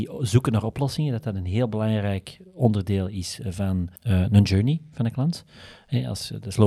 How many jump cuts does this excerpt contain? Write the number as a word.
one